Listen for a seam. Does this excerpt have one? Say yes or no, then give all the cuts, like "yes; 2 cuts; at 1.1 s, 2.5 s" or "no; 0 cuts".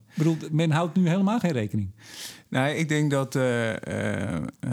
no; 0 cuts